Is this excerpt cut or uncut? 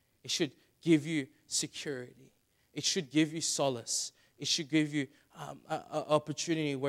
uncut